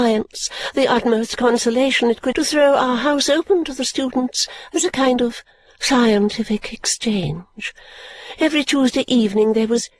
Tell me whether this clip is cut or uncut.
cut